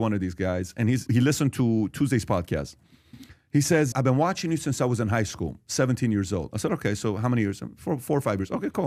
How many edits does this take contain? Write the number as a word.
two